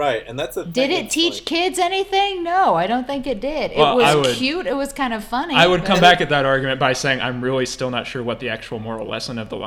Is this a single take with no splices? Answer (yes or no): yes